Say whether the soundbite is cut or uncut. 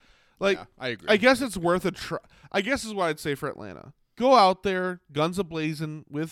uncut